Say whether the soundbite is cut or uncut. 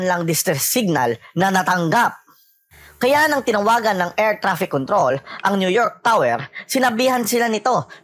uncut